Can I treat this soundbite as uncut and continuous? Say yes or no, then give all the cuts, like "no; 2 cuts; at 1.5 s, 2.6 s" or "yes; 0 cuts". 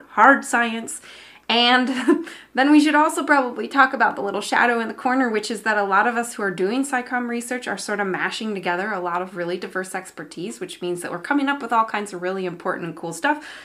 yes; 0 cuts